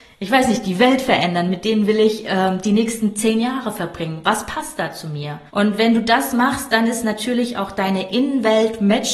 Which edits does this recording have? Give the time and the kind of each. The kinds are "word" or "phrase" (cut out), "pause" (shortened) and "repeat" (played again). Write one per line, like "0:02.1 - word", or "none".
0:05.5 - pause